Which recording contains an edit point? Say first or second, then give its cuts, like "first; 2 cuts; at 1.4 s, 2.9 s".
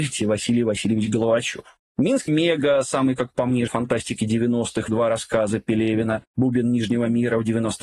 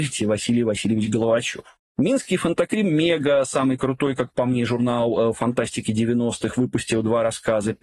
first; 4 cuts; at 2.3 s, 3.2 s, 3.7 s, 4.9 s